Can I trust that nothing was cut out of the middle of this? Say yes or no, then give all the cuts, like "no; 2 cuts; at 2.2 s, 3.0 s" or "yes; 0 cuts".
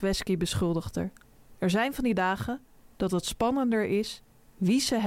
yes; 0 cuts